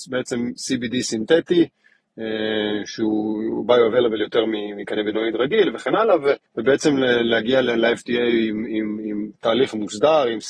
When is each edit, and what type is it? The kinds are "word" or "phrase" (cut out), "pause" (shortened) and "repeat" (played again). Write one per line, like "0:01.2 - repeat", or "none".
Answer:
0:06.4 - pause

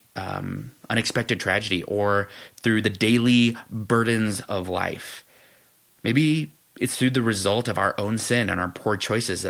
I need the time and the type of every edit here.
none

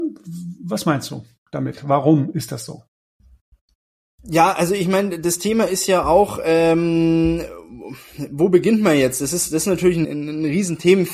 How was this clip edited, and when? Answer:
0:10.0 - word

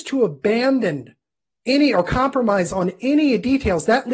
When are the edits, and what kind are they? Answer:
0:01.3 - pause

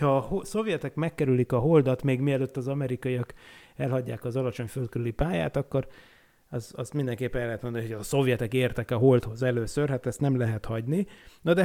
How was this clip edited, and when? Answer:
none

